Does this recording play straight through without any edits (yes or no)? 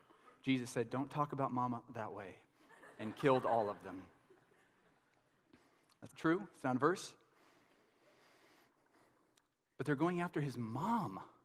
no